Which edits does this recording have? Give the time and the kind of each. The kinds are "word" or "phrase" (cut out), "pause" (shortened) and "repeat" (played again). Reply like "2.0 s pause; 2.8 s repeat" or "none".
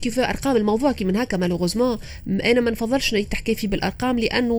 none